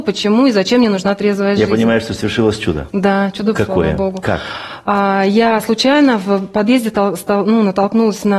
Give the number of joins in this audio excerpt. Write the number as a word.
one